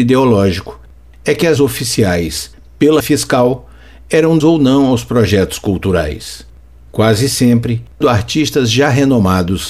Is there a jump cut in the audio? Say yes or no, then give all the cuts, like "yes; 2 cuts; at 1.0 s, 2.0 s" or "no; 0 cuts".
yes; 4 cuts; at 1.6 s, 3.0 s, 4.4 s, 8.0 s